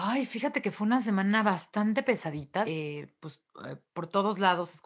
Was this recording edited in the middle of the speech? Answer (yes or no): yes